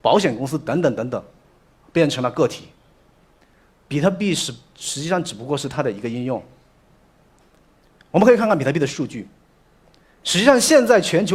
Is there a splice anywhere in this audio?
no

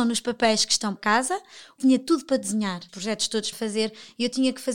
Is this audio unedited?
no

